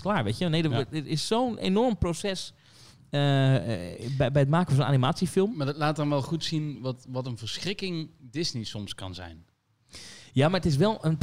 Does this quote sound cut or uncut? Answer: uncut